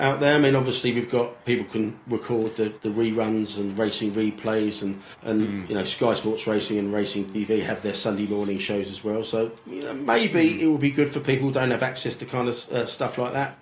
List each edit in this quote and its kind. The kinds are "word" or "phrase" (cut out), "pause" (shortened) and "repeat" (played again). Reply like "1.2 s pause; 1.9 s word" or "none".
2.8 s pause; 5.1 s pause

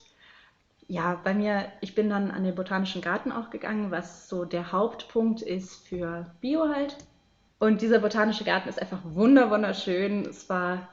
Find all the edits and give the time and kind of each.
none

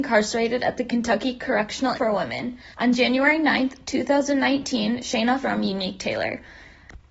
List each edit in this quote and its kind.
1.9 s word; 2.7 s pause; 5.4 s phrase

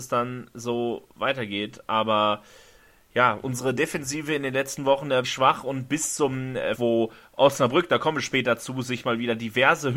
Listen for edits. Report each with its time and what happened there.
5.2 s word; 6.8 s word

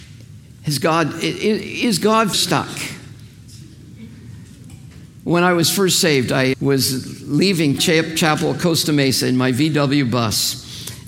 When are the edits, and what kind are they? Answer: 2.3 s word; 6.5 s word; 7.8 s word

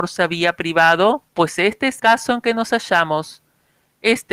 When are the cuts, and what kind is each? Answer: 1.3 s pause; 2.0 s word

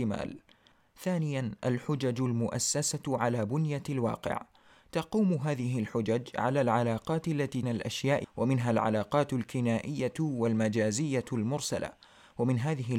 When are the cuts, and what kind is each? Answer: 7.6 s phrase; 8.2 s word

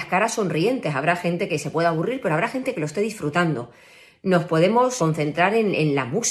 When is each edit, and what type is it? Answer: 5.0 s word

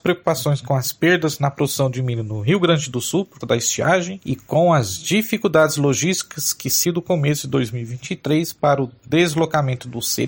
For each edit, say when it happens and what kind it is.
3.4 s word; 6.8 s phrase

